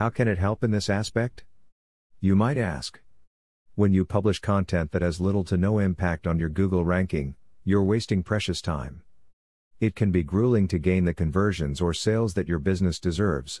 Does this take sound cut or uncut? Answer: uncut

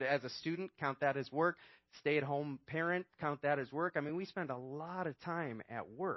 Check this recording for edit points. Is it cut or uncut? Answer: uncut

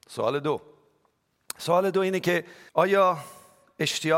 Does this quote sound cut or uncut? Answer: cut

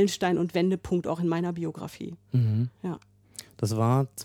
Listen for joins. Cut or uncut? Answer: cut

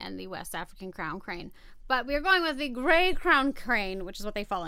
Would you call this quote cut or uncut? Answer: uncut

